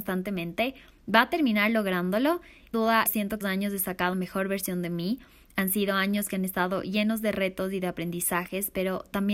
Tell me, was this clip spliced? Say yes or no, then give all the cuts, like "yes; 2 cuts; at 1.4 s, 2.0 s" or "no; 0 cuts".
yes; 4 cuts; at 2.7 s, 3.1 s, 3.4 s, 4.1 s